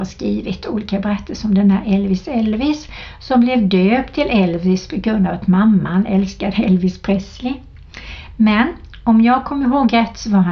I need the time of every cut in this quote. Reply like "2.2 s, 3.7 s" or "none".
none